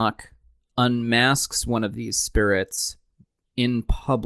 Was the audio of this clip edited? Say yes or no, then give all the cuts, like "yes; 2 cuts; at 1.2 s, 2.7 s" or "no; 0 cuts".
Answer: no; 0 cuts